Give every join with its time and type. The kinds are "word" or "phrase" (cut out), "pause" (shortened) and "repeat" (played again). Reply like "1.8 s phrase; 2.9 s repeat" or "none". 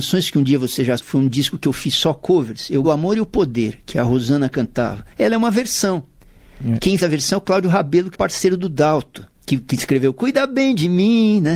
1.0 s word; 2.8 s word; 5.1 s pause; 7.0 s word; 8.1 s word; 9.3 s pause